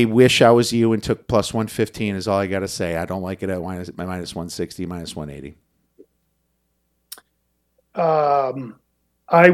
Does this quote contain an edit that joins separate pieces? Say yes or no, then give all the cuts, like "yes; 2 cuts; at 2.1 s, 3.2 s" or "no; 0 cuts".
no; 0 cuts